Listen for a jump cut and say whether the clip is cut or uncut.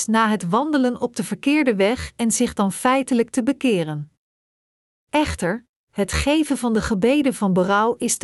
uncut